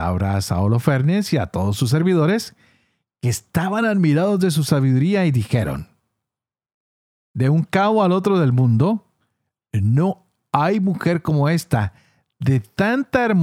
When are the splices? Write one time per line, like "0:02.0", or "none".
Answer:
none